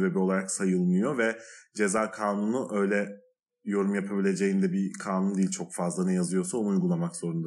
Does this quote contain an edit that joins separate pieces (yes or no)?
no